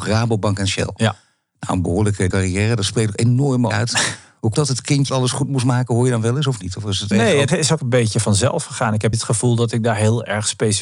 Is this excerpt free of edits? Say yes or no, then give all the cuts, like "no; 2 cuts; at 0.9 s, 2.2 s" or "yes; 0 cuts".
no; 8 cuts; at 2.3 s, 3.7 s, 4.5 s, 5.1 s, 7.1 s, 7.5 s, 7.8 s, 9.1 s